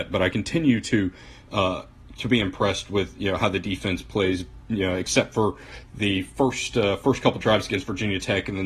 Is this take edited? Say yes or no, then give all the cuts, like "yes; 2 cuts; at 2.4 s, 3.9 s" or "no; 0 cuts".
no; 0 cuts